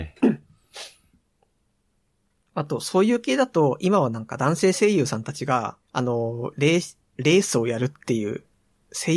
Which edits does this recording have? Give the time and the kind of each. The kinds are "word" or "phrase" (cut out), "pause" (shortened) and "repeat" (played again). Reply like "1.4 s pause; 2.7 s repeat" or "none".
5.8 s pause